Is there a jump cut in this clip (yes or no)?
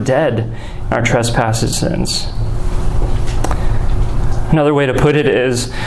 yes